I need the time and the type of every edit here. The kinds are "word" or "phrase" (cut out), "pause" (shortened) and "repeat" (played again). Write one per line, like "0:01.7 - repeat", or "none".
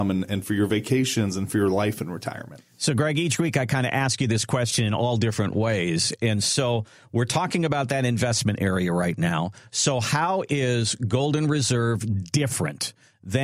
0:02.7 - pause